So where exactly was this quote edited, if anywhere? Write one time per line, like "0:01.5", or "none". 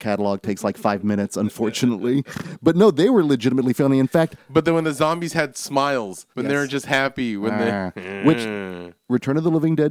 0:06.3